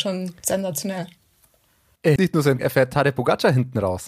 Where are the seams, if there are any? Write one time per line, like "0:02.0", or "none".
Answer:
0:02.2
0:02.6